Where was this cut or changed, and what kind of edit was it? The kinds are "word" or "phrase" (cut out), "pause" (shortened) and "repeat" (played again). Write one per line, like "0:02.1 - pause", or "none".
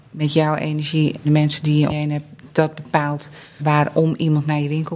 0:01.2 - word
0:01.9 - word
0:03.6 - word

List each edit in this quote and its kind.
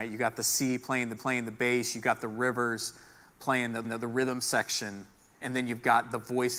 0:01.2 - repeat
0:03.8 - repeat
0:05.4 - word

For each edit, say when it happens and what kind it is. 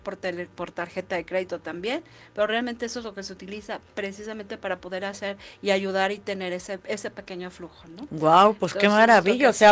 none

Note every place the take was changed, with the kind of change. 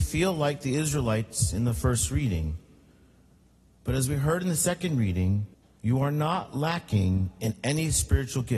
0:05.5 - pause

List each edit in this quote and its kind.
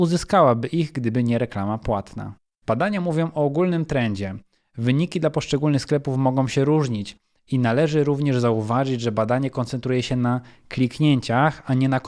none

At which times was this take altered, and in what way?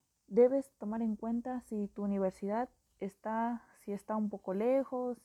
none

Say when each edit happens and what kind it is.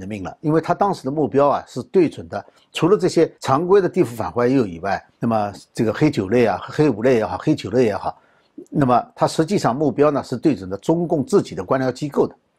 0:03.3 - pause
0:05.1 - pause

